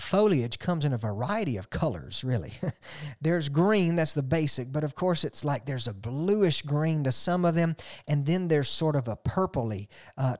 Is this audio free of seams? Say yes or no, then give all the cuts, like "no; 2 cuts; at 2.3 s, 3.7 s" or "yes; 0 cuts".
yes; 0 cuts